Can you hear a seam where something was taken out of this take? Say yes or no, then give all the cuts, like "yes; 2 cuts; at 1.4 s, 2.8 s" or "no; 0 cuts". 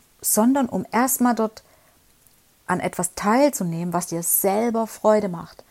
no; 0 cuts